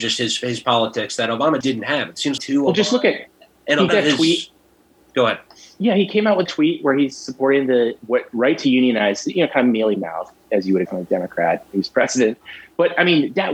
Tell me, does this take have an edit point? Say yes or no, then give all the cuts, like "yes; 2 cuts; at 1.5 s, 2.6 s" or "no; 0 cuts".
yes; 6 cuts; at 1.6 s, 2.4 s, 3.9 s, 6.5 s, 8.0 s, 10.9 s